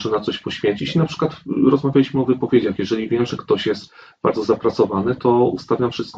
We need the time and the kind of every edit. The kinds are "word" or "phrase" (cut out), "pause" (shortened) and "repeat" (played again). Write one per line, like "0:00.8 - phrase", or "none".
none